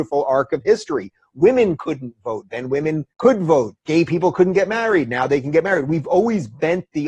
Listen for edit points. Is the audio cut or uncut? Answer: cut